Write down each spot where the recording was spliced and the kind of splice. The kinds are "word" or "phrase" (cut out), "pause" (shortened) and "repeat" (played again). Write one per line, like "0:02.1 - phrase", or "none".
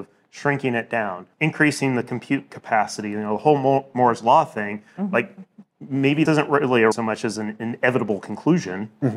0:01.3 - pause
0:06.3 - word
0:06.9 - word